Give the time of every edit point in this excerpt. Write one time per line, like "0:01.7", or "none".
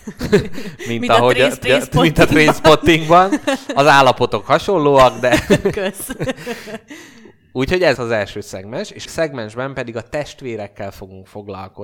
0:01.6
0:08.0
0:09.1